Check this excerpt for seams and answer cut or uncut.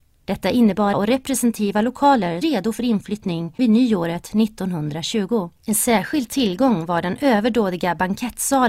cut